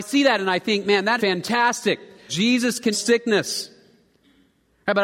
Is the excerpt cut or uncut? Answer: cut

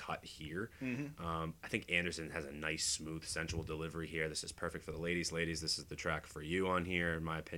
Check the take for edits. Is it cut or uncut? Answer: uncut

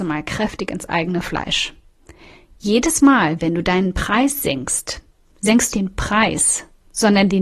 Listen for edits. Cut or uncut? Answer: cut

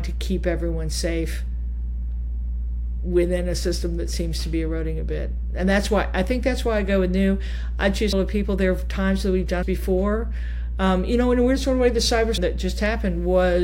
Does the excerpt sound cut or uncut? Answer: cut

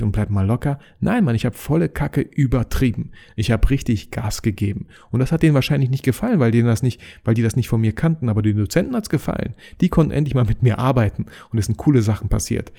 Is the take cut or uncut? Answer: uncut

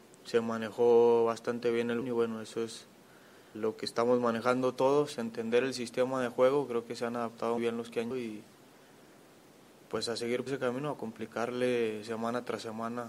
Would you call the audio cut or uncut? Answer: cut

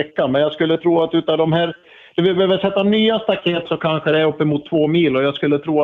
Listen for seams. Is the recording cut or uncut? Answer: uncut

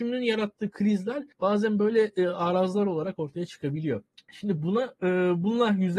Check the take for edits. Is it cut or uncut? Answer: uncut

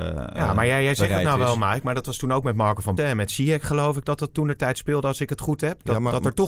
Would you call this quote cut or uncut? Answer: cut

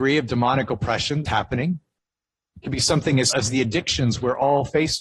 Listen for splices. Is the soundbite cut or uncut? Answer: cut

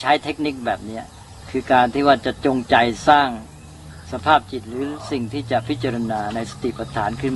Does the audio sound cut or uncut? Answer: cut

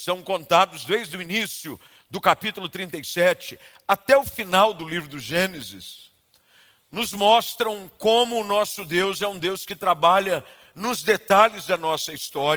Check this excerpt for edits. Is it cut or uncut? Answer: uncut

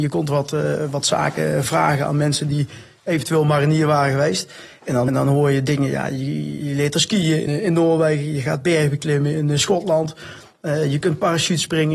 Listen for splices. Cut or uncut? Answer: cut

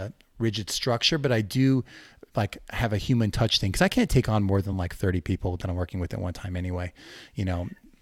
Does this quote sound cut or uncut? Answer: uncut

